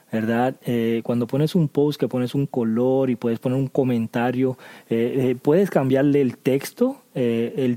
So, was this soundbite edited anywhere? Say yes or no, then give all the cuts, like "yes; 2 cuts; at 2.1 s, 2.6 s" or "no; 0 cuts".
no; 0 cuts